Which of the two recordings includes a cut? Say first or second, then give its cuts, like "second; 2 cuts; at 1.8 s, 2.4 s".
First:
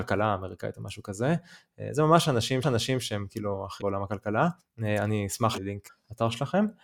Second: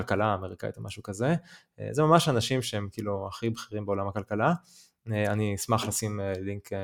first; 5 cuts; at 2.6 s, 3.8 s, 4.6 s, 5.6 s, 5.9 s